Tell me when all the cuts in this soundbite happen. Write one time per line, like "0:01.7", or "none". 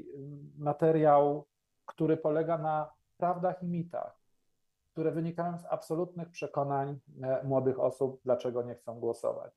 none